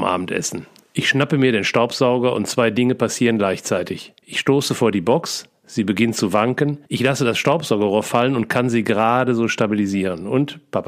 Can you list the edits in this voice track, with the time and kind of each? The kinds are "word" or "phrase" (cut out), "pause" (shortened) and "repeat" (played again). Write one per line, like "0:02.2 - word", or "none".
0:04.2 - pause
0:06.9 - pause